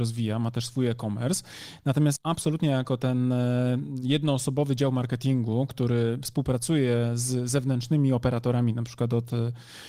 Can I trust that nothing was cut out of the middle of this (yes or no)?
no